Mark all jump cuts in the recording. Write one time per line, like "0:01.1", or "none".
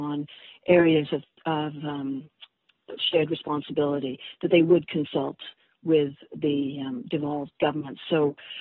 none